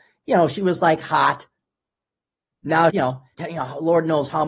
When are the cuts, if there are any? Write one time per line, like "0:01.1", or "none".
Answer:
0:02.9
0:03.3

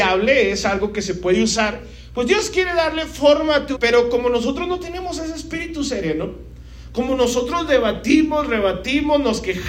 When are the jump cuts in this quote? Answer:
0:03.8

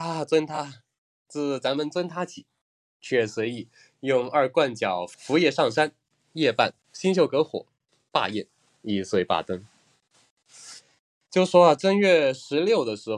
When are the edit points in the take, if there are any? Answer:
none

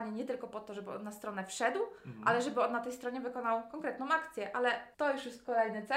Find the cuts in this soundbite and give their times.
none

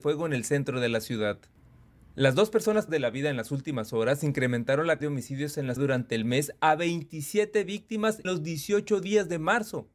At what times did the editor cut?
0:02.9
0:05.0
0:05.8
0:08.2

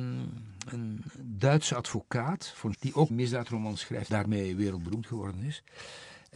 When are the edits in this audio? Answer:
0:02.7
0:03.1
0:04.1

